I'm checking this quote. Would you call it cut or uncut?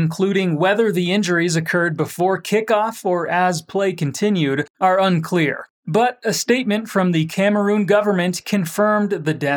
uncut